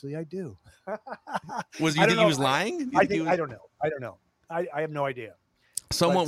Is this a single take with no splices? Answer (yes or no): yes